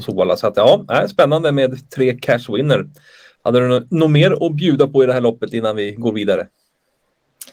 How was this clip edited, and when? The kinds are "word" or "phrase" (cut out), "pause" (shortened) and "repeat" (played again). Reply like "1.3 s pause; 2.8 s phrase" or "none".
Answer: none